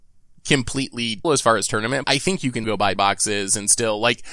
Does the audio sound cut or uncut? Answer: cut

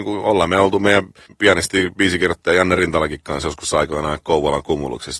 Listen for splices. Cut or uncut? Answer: cut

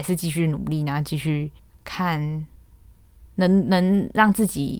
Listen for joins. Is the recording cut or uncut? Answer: cut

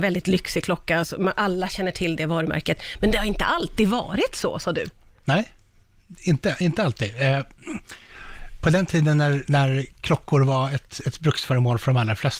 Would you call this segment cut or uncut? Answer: uncut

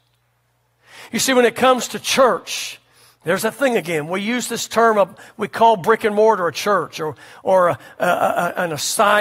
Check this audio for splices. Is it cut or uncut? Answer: uncut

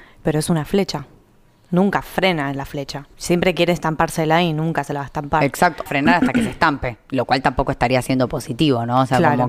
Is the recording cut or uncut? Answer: cut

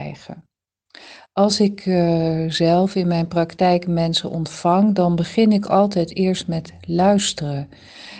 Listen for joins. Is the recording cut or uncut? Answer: uncut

